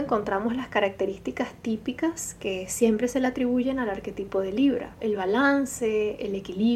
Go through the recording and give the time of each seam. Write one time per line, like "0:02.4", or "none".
0:05.0